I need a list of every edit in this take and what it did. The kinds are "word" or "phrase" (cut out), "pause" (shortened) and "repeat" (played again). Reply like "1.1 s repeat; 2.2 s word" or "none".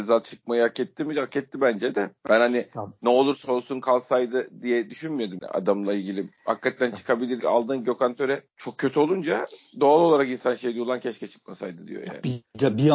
2.2 s pause; 5.4 s word; 7.4 s phrase; 8.5 s pause